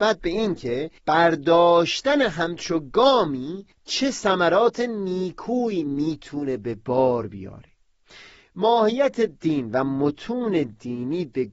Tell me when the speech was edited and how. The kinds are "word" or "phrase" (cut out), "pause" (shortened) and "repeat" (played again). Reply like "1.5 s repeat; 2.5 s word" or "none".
1.0 s pause; 3.7 s pause